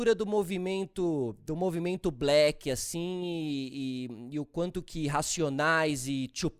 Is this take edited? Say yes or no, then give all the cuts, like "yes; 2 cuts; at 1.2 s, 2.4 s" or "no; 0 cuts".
no; 0 cuts